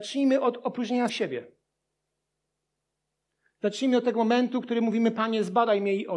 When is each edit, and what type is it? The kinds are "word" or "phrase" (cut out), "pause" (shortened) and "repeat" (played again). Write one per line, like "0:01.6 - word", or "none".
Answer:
0:01.1 - word